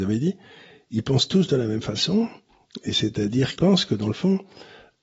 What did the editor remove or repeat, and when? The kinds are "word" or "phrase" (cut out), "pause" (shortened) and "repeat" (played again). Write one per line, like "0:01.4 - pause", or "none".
0:03.6 - word